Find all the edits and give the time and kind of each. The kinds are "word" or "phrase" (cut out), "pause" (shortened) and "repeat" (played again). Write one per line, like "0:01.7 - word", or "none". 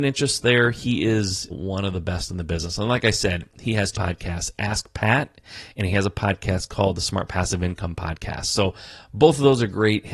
0:01.5 - word
0:03.9 - word